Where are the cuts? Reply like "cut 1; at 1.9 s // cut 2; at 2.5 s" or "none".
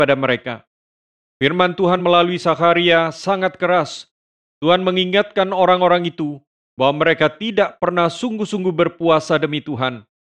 none